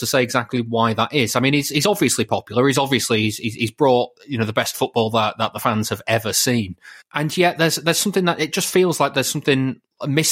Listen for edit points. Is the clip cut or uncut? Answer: cut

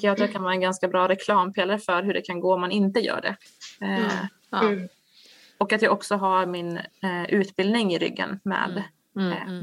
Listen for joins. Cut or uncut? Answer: uncut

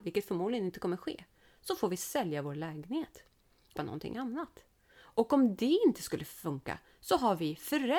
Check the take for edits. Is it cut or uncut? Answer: cut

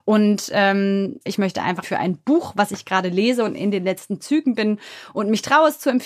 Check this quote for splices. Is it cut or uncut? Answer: cut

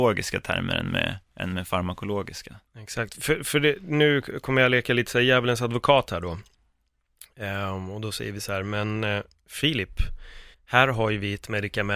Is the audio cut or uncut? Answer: cut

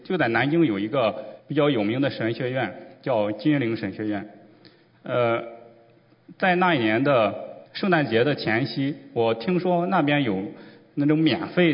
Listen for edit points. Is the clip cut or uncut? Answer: cut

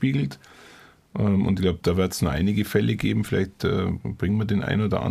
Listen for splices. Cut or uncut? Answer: uncut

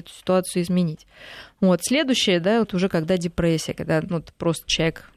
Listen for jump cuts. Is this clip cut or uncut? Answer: cut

